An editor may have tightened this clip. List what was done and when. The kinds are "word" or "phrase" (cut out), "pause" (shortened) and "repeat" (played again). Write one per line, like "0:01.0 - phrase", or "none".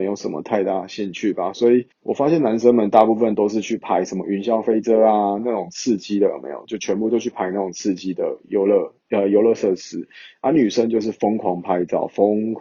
0:01.9 - pause